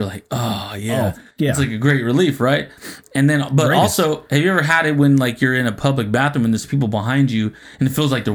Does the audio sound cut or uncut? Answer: cut